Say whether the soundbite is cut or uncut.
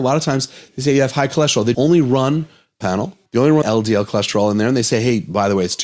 cut